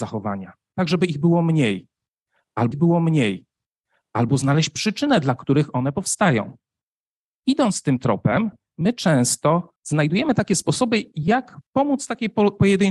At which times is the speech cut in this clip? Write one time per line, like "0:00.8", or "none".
0:02.7
0:09.8
0:11.7